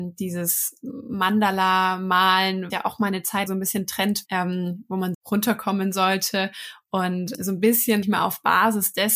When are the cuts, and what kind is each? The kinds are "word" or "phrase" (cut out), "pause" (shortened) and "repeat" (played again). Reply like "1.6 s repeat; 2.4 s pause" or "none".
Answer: 2.7 s word; 3.5 s word; 4.3 s word; 5.1 s word; 7.3 s word; 8.0 s word